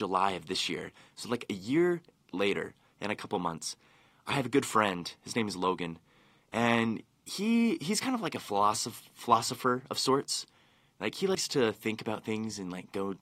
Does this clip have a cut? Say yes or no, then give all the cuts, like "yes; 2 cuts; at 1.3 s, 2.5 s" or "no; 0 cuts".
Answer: no; 0 cuts